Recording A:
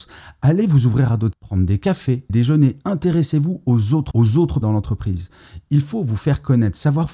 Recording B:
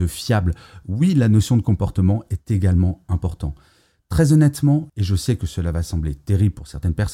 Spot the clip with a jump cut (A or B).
A